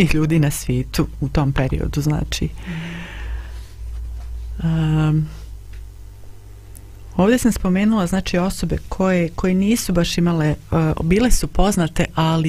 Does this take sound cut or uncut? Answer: uncut